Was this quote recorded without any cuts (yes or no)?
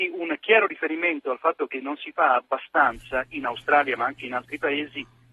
yes